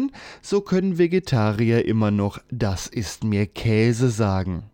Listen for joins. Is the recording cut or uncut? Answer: uncut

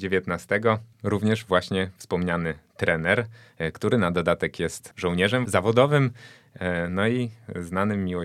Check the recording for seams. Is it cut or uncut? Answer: cut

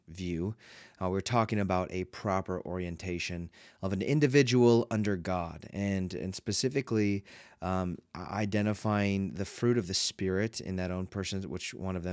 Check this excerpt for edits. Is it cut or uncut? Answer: uncut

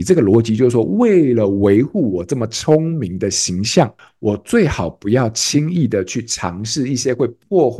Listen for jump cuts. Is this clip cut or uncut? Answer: uncut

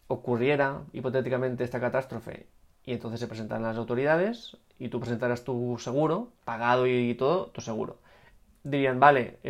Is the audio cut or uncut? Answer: cut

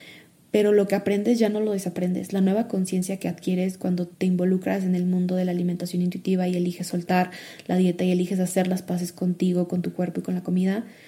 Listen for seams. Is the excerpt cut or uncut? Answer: cut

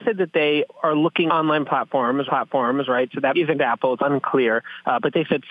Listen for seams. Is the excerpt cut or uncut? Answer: cut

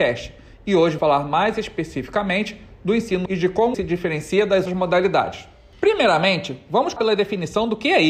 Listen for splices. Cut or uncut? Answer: cut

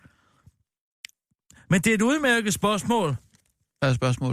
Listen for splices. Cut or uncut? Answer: uncut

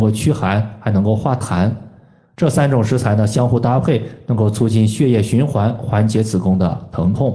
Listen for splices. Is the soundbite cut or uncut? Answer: uncut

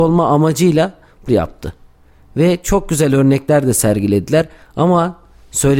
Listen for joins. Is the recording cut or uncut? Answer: cut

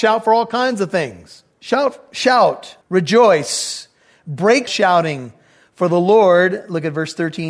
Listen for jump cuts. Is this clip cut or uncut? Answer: cut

